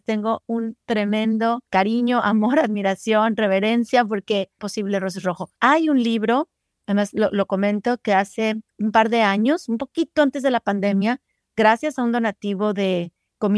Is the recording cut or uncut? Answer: cut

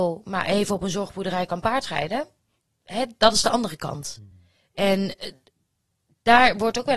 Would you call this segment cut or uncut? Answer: uncut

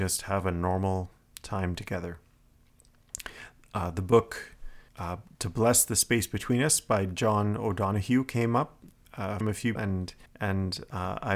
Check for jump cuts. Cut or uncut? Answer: cut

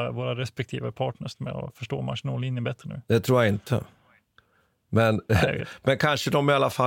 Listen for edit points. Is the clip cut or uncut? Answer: uncut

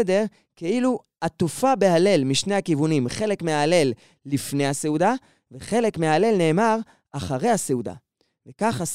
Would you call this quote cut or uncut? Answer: uncut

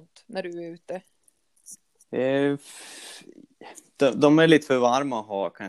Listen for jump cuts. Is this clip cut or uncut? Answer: uncut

